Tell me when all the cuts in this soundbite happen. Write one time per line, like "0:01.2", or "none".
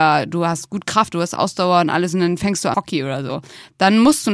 0:01.1
0:02.7